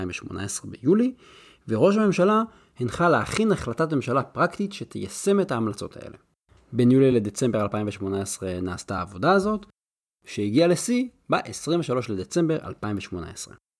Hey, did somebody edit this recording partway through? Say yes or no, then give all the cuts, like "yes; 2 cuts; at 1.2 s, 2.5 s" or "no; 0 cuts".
no; 0 cuts